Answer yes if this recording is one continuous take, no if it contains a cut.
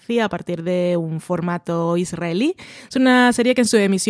yes